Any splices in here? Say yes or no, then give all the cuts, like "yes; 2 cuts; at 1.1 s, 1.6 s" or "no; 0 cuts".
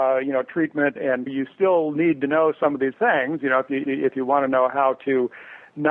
yes; 4 cuts; at 1.0 s, 1.3 s, 2.9 s, 3.8 s